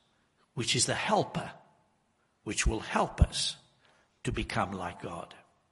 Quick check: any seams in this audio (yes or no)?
no